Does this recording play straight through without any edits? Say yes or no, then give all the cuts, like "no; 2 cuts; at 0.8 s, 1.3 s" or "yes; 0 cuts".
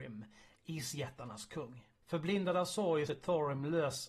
no; 2 cuts; at 1.9 s, 3.1 s